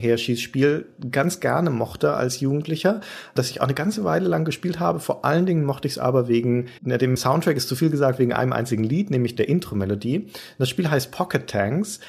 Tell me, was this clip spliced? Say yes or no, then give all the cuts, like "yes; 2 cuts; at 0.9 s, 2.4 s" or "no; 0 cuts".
yes; 1 cut; at 6.8 s